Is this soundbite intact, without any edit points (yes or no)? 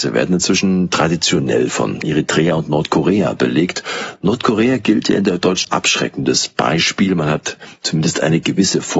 no